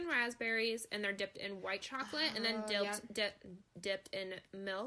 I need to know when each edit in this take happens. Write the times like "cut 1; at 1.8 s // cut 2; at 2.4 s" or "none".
none